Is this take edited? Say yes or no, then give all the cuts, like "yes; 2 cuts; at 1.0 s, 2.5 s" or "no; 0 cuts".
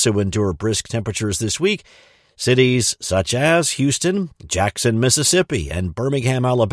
no; 0 cuts